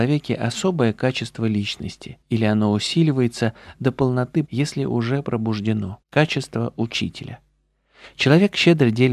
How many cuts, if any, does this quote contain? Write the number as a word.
three